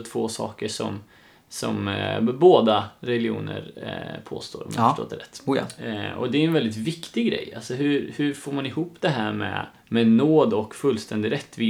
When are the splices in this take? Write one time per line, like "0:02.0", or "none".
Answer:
0:09.8